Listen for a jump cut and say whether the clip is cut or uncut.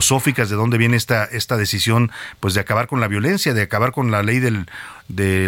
uncut